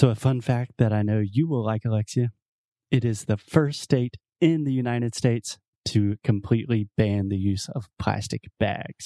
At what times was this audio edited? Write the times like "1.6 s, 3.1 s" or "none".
none